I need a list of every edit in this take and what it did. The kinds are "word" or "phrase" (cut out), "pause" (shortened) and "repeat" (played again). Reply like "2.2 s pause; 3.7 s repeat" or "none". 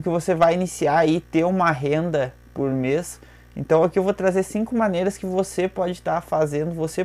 none